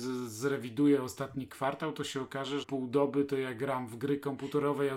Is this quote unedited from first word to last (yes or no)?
no